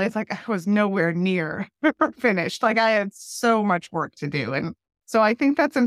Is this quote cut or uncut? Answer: uncut